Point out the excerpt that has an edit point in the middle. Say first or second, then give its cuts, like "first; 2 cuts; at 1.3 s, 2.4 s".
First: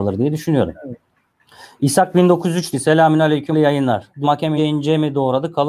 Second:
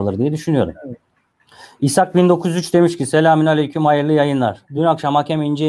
first; 4 cuts; at 2.7 s, 3.5 s, 4.2 s, 4.6 s